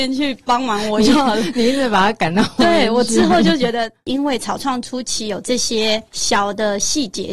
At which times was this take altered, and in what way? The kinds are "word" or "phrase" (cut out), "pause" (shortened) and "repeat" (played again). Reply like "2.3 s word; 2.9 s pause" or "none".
6.1 s pause